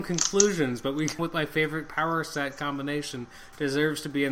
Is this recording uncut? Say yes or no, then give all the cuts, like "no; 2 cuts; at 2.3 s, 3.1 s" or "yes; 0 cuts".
no; 1 cut; at 1.2 s